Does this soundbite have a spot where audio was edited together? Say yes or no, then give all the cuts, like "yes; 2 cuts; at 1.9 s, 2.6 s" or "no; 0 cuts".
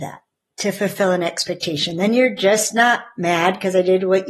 no; 0 cuts